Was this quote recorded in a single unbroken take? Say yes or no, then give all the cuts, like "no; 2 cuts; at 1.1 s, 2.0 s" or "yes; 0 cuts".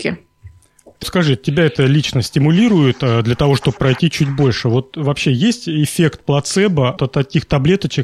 no; 3 cuts; at 1.0 s, 3.8 s, 7.0 s